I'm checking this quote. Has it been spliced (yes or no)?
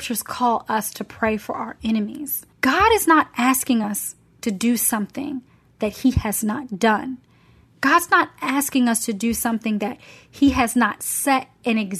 no